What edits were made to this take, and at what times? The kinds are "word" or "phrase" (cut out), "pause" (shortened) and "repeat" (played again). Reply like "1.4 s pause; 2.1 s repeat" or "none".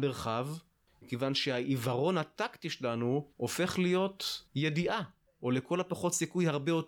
3.3 s pause; 4.5 s pause